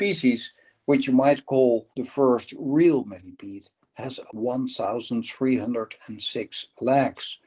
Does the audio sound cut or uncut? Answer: cut